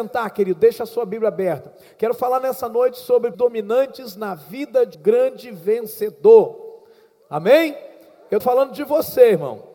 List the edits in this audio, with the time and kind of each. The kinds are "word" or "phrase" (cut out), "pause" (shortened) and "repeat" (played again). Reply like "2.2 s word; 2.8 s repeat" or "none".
3.3 s word; 4.9 s word; 8.4 s word